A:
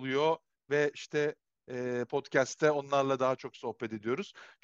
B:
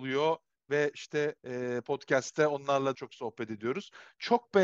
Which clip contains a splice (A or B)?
B